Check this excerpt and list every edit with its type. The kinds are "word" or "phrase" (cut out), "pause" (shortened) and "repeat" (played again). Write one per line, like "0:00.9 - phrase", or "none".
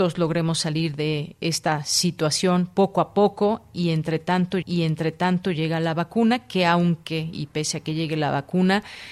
0:04.6 - repeat